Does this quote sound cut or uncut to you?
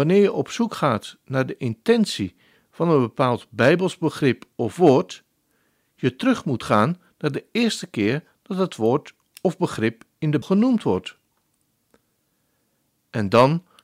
cut